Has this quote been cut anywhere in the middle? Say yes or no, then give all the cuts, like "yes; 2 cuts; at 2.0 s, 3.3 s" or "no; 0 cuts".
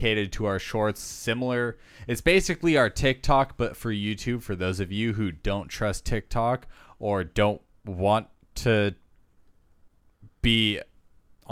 no; 0 cuts